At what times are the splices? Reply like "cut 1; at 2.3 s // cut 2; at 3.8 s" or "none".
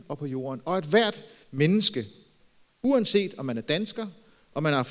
none